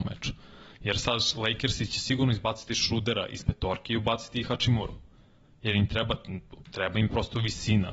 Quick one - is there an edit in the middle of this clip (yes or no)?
no